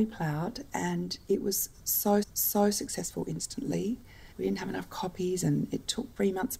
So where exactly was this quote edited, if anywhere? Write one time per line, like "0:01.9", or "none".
0:02.2
0:04.3